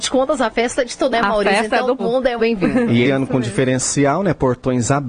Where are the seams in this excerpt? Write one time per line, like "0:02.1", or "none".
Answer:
0:01.1
0:02.0
0:02.4
0:03.0